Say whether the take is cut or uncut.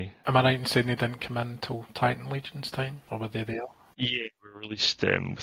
uncut